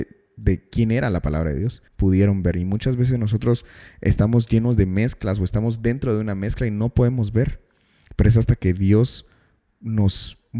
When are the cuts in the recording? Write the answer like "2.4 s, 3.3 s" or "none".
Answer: 1.9 s